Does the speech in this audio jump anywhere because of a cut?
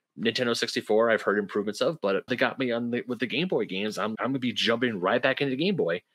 yes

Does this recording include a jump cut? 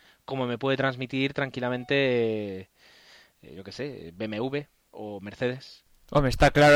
no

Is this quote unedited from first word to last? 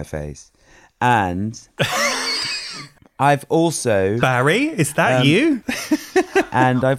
yes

